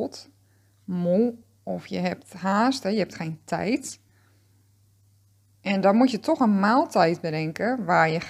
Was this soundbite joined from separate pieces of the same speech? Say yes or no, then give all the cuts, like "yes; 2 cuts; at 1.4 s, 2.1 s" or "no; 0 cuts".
no; 0 cuts